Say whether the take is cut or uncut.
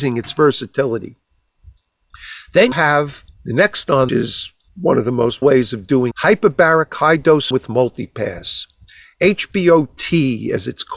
cut